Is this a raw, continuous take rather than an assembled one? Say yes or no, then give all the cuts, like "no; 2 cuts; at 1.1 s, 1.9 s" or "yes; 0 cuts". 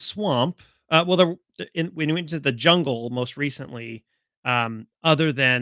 yes; 0 cuts